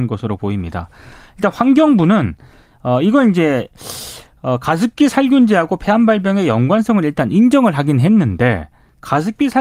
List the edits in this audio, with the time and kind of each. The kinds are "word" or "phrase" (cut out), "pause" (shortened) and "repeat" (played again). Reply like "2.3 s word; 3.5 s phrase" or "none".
none